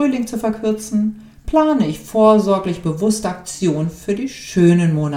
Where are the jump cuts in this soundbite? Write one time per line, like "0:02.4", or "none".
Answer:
none